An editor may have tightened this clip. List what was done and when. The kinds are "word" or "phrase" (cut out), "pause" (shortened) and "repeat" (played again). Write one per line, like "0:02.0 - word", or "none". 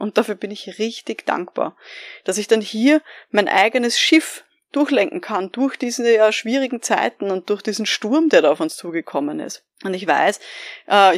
0:09.7 - pause

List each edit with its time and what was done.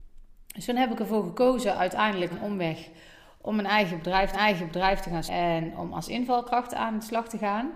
0:02.3 - word
0:04.3 - repeat
0:05.3 - word

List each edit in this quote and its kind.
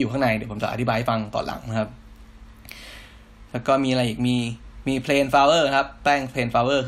0:03.5 - pause

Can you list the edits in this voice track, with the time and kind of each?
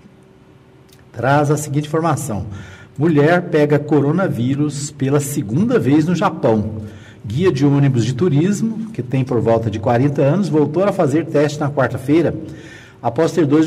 none

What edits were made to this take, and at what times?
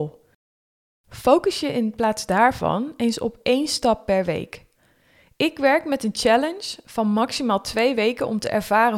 none

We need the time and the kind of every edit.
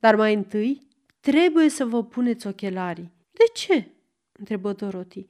0:03.2 - pause

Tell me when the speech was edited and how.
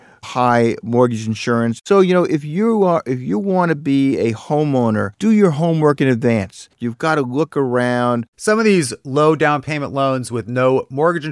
0:05.1 - pause
0:06.7 - pause
0:08.3 - pause

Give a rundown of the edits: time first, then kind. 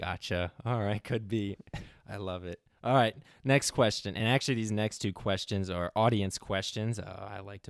none

